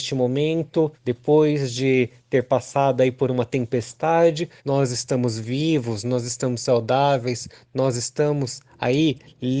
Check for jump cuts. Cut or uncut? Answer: cut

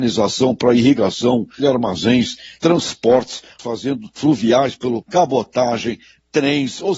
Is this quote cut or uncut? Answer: cut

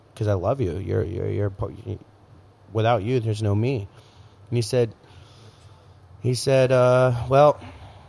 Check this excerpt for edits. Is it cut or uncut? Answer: uncut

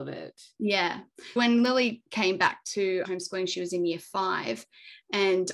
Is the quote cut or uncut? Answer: cut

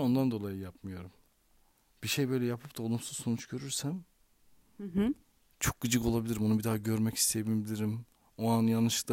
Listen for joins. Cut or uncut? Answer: uncut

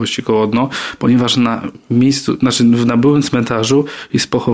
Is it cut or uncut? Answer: uncut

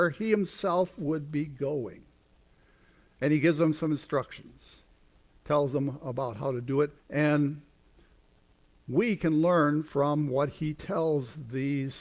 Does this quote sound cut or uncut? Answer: cut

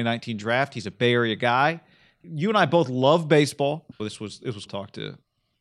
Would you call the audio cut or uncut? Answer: cut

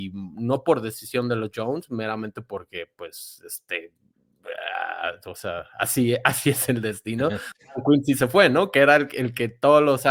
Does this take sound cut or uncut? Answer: uncut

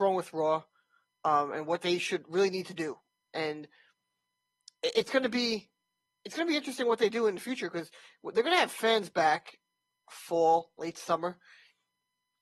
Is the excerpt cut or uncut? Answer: uncut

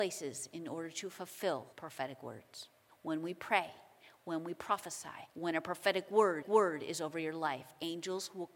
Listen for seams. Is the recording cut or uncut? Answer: cut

